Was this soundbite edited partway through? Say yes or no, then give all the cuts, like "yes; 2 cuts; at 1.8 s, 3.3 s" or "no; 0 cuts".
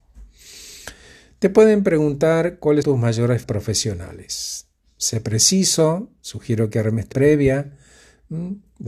yes; 3 cuts; at 2.8 s, 3.4 s, 7.1 s